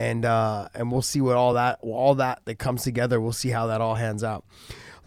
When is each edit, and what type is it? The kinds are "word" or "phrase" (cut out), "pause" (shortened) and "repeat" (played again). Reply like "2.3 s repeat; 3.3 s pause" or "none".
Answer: none